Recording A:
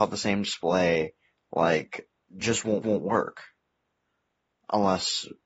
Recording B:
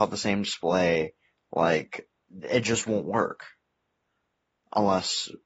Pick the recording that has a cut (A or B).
A